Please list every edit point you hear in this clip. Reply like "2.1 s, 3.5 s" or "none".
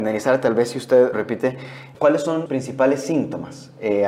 1.1 s, 1.9 s, 2.5 s